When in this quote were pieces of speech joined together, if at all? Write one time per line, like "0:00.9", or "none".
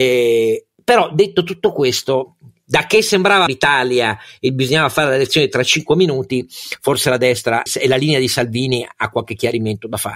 0:03.5
0:07.7